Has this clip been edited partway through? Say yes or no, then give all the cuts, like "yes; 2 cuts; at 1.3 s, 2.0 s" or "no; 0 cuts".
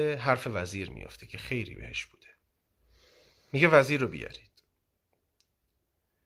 no; 0 cuts